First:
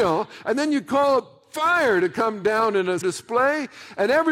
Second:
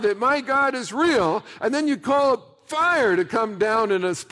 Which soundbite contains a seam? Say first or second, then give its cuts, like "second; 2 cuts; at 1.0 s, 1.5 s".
first; 1 cut; at 3.0 s